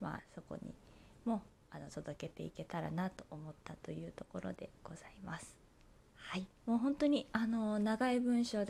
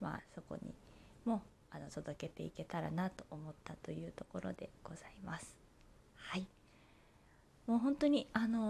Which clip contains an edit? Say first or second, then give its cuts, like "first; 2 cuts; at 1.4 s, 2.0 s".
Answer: first; 1 cut; at 6.6 s